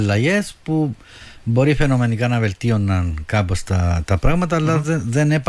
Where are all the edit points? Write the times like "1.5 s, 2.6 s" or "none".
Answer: none